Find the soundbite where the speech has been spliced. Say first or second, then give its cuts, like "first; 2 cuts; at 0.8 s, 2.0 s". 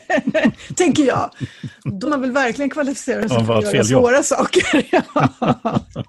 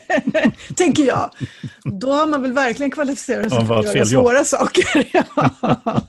first; 1 cut; at 2.0 s